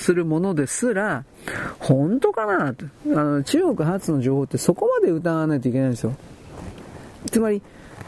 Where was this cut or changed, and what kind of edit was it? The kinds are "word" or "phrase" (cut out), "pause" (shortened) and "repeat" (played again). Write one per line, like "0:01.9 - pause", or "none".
0:03.0 - pause